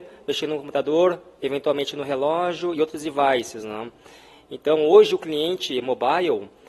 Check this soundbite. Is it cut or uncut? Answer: uncut